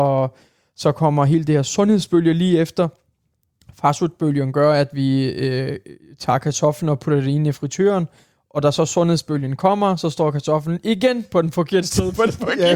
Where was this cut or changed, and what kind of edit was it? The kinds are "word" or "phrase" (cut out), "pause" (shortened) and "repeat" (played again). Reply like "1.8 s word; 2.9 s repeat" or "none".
none